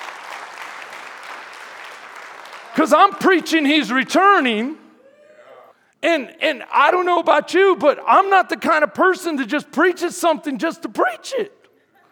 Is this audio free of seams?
no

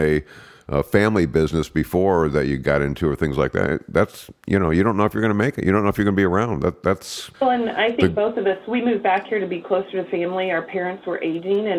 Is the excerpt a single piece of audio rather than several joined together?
no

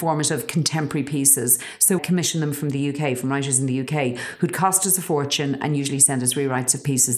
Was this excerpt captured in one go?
no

